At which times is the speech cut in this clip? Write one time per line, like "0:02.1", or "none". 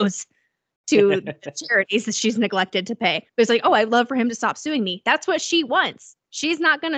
0:03.3